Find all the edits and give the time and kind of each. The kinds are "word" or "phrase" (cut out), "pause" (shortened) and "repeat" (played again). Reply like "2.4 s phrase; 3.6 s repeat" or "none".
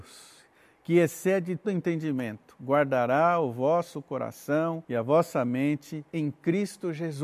1.6 s word; 4.8 s pause; 6.1 s pause